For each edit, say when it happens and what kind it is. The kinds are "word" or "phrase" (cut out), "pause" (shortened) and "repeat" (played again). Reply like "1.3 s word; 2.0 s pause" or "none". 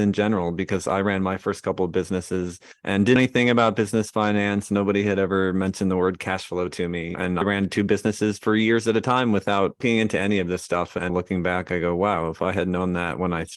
3.2 s word; 9.8 s word; 11.1 s word